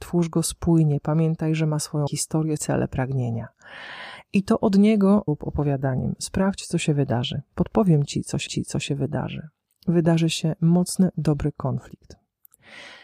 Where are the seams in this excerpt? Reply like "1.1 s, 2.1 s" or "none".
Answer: 2.1 s, 2.6 s, 5.3 s, 8.5 s